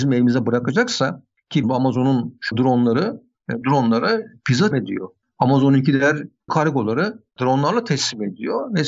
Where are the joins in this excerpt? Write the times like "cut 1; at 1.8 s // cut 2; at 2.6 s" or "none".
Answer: cut 1; at 1.6 s // cut 2; at 2.5 s // cut 3; at 3.6 s // cut 4; at 4.7 s // cut 5; at 6.5 s // cut 6; at 7.3 s